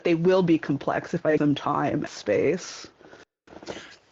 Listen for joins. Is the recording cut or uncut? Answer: cut